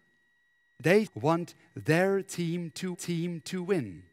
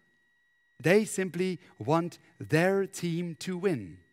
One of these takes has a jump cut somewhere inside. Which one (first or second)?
first